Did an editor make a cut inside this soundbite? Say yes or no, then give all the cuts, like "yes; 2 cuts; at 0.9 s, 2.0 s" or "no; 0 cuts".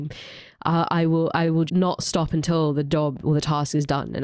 yes; 1 cut; at 1.7 s